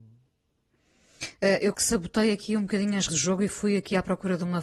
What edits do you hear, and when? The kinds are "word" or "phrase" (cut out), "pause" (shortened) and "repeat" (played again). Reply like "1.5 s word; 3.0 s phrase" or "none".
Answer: 1.7 s word; 3.1 s word